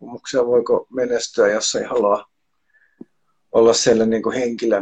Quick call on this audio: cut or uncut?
uncut